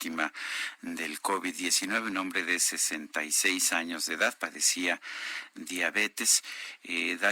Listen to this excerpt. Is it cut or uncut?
uncut